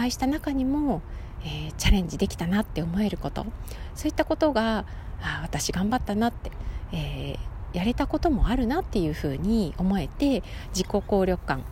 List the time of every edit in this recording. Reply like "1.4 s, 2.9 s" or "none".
none